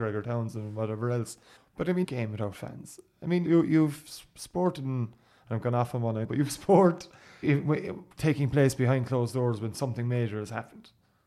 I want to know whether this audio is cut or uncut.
cut